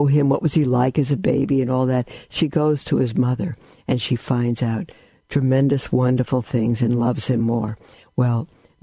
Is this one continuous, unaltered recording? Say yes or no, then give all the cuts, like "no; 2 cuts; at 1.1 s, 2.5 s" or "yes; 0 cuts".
yes; 0 cuts